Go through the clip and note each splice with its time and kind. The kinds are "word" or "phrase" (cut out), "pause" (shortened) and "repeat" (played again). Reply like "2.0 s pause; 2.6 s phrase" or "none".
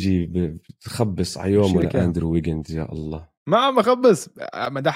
3.4 s pause